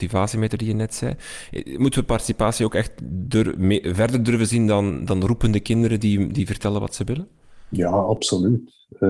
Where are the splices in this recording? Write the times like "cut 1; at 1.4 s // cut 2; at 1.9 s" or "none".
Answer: none